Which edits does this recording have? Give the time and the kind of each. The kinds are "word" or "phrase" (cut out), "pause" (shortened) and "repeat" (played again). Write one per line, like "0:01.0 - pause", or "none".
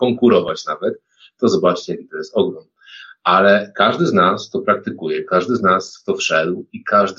none